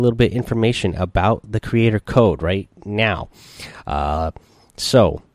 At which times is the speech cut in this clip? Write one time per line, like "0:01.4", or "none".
none